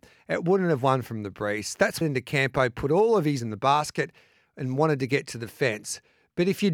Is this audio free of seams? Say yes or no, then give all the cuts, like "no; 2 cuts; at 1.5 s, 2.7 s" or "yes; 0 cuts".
no; 2 cuts; at 2.0 s, 3.4 s